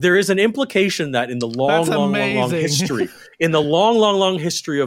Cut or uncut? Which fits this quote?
uncut